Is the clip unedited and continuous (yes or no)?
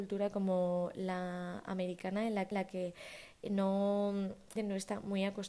no